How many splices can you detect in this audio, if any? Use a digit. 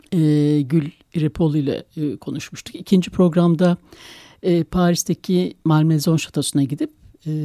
0